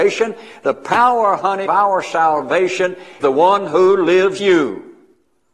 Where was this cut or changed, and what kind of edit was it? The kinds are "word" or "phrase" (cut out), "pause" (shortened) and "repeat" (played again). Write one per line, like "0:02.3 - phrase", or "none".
0:01.7 - word
0:03.2 - word
0:04.4 - word